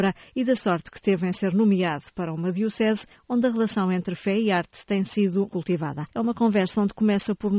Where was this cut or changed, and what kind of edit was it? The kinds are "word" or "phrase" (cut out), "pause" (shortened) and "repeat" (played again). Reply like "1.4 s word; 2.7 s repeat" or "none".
5.5 s word; 6.1 s pause